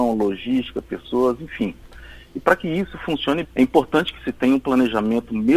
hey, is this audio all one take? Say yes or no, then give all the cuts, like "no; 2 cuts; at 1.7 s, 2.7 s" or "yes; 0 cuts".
no; 1 cut; at 3.4 s